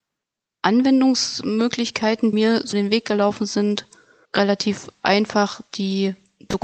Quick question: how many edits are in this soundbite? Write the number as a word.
three